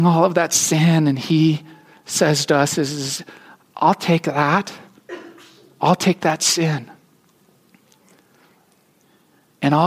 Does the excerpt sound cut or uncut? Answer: uncut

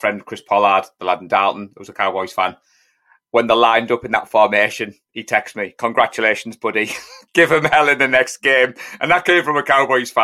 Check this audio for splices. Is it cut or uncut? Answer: uncut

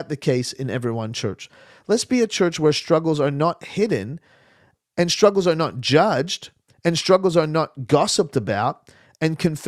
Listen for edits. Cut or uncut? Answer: uncut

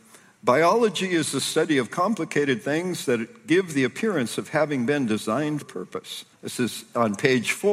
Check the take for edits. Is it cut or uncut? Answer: cut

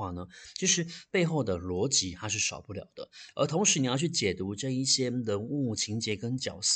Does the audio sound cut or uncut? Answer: uncut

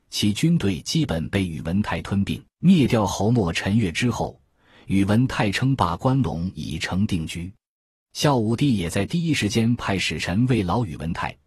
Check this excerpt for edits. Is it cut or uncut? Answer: cut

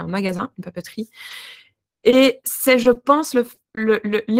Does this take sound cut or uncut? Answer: uncut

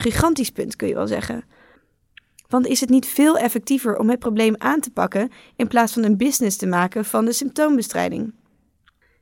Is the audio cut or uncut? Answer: uncut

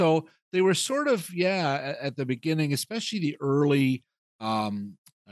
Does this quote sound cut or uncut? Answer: uncut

